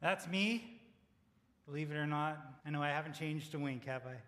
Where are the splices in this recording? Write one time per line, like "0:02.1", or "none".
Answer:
0:02.6